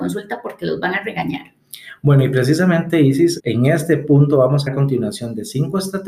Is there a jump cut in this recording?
yes; 2 cuts; at 3.4 s, 4.7 s

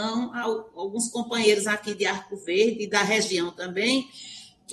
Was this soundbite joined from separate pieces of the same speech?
no; 0 cuts

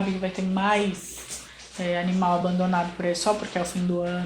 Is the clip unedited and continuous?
yes; 0 cuts

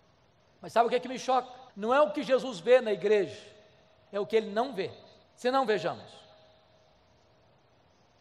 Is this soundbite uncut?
no; 2 cuts; at 1.7 s, 5.2 s

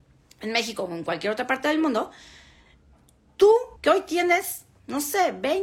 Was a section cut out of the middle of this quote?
yes; 1 cut; at 3.8 s

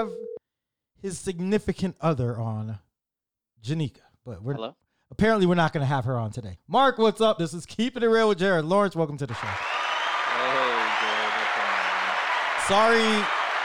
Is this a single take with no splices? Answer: yes; 0 cuts

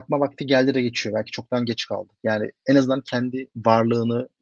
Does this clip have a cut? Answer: no; 0 cuts

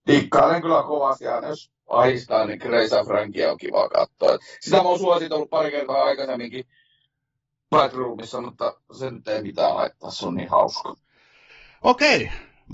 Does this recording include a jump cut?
no; 0 cuts

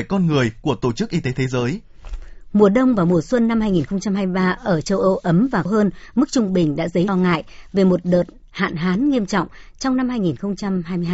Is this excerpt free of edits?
no; 2 cuts; at 5.7 s, 7.1 s

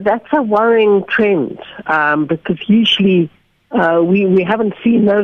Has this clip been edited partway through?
no; 0 cuts

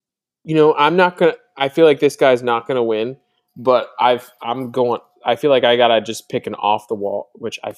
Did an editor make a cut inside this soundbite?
no; 0 cuts

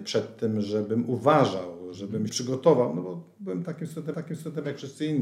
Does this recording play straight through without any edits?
no; 2 cuts; at 2.3 s, 4.1 s

